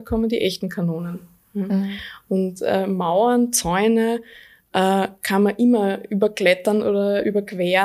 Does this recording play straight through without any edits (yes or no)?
yes